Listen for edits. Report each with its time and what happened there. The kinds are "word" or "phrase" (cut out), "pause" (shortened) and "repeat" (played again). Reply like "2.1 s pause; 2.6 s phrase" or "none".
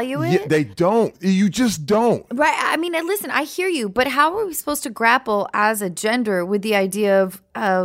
none